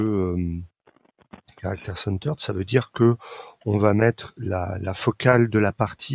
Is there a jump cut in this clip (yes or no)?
no